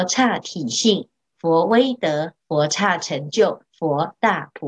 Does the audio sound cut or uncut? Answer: cut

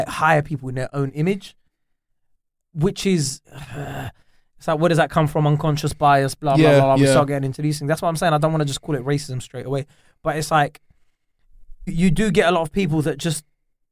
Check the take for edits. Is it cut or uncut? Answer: cut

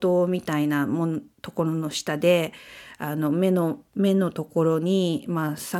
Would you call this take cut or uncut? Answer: cut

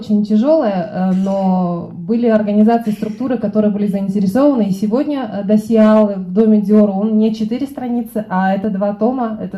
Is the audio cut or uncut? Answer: uncut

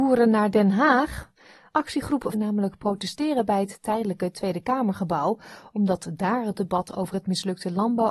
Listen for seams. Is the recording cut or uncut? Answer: cut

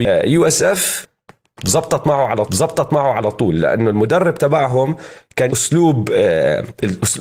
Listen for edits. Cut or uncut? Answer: cut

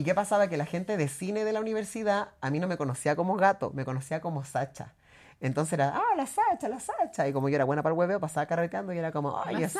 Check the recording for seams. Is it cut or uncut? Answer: uncut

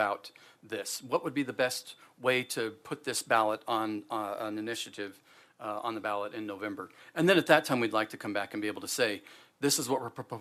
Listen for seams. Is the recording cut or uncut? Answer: uncut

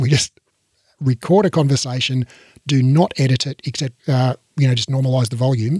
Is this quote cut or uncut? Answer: cut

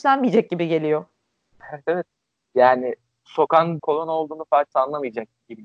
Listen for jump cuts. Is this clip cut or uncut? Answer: cut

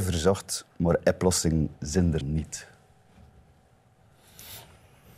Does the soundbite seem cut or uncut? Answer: cut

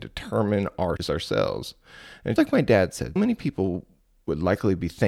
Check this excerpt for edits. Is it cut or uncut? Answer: cut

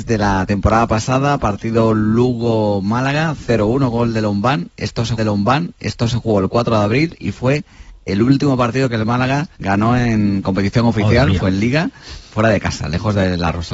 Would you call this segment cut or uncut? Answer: cut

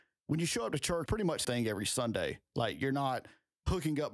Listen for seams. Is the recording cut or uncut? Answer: cut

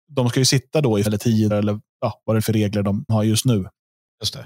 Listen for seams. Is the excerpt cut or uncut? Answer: cut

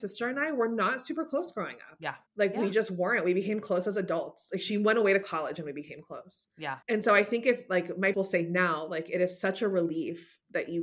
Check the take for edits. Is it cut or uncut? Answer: cut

